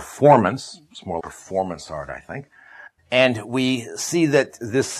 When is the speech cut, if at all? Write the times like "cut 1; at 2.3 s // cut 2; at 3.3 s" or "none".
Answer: cut 1; at 1.2 s // cut 2; at 3.0 s